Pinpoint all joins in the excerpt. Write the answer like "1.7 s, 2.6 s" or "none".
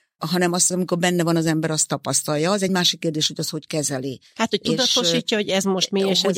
none

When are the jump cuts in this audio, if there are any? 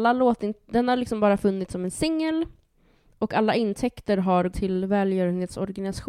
4.5 s

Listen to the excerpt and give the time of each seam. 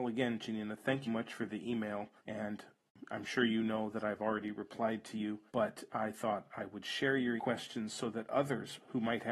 1.1 s, 2.2 s, 5.5 s, 7.4 s

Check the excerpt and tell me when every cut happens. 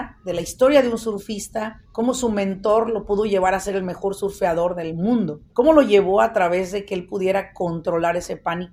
1.8 s, 5.5 s

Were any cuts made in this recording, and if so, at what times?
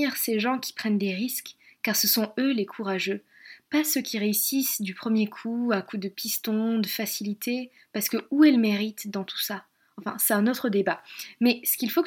none

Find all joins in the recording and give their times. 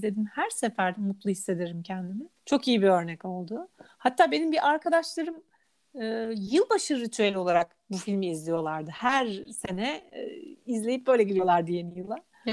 2.4 s

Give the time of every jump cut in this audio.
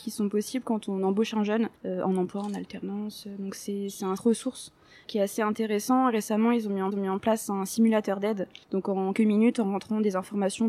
1.8 s, 4.2 s, 5.0 s, 6.9 s, 8.6 s, 9.1 s

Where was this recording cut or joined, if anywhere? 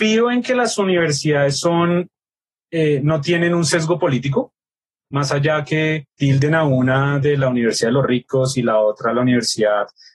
none

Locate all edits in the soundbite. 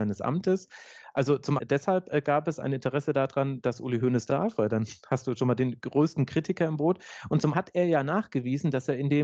1.6 s, 4.3 s, 7.5 s

